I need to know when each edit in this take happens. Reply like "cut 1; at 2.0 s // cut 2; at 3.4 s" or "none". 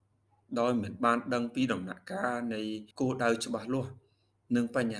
cut 1; at 2.9 s